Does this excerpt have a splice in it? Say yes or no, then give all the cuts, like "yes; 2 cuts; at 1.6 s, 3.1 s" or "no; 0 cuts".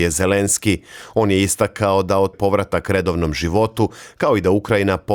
yes; 1 cut; at 2.3 s